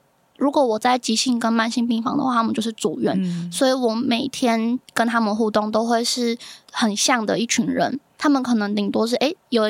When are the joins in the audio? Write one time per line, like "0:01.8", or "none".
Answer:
0:06.6